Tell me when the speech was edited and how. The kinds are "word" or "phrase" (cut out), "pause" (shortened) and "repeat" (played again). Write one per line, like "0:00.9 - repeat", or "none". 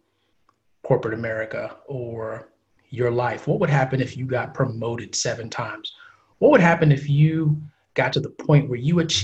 none